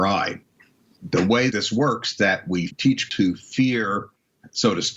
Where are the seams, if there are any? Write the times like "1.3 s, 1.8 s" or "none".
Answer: 1.5 s, 2.2 s, 2.7 s, 3.1 s